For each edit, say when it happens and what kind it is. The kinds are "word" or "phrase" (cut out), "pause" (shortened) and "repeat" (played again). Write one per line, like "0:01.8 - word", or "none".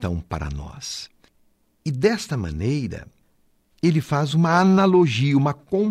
none